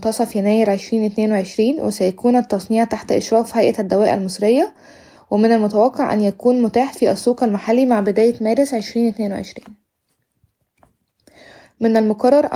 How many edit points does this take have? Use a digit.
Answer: 0